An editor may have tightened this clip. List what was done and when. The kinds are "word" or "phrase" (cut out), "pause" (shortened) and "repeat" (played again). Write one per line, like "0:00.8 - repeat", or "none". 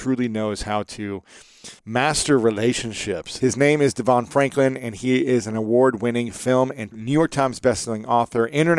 0:01.8 - pause
0:06.9 - phrase